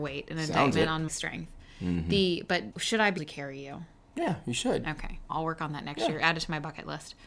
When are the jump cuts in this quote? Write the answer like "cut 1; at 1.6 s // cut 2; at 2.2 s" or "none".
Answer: cut 1; at 1.1 s // cut 2; at 2.7 s // cut 3; at 3.2 s // cut 4; at 5.3 s